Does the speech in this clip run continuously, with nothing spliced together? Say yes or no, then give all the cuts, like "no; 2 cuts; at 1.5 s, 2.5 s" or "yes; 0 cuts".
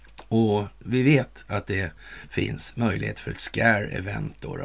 yes; 0 cuts